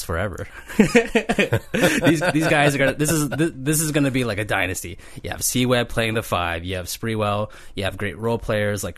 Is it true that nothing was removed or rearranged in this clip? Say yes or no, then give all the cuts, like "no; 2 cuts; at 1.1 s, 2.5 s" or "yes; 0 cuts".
yes; 0 cuts